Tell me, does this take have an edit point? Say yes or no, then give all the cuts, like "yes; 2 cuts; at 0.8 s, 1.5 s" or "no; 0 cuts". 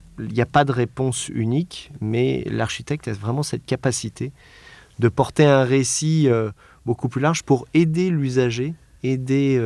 no; 0 cuts